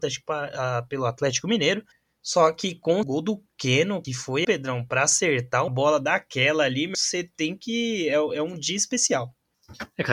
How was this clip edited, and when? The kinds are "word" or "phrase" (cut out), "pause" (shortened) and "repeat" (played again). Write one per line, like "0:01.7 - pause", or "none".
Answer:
0:01.9 - pause
0:03.0 - phrase
0:04.0 - phrase
0:04.4 - word
0:05.7 - word
0:06.9 - word